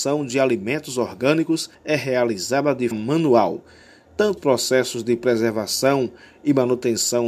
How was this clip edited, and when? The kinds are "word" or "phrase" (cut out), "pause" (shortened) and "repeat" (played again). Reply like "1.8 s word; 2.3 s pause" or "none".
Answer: 1.7 s pause; 2.9 s word; 4.4 s word